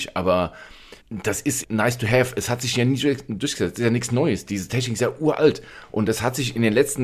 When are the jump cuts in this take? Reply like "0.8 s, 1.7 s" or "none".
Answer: 1.0 s, 1.6 s